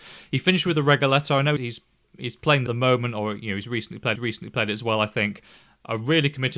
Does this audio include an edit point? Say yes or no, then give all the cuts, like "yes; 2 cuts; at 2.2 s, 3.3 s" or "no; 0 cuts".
yes; 3 cuts; at 1.6 s, 2.7 s, 4.2 s